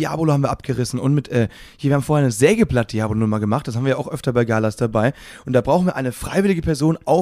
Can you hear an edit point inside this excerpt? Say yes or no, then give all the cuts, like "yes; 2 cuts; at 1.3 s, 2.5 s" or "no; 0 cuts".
no; 0 cuts